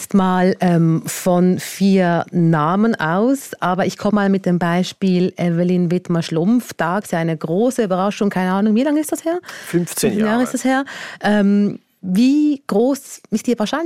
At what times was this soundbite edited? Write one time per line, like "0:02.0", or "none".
0:04.1
0:07.0